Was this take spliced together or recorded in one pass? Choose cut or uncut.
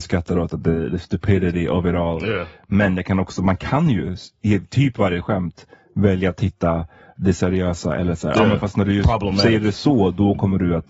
uncut